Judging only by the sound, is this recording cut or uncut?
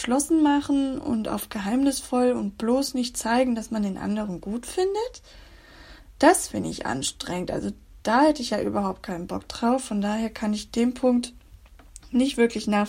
uncut